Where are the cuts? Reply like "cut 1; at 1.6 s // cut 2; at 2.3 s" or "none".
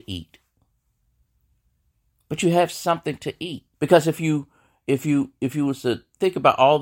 cut 1; at 3.7 s